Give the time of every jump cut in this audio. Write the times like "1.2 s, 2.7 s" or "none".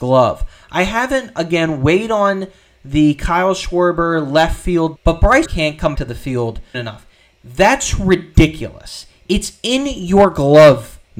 5.0 s, 5.4 s, 5.9 s, 6.7 s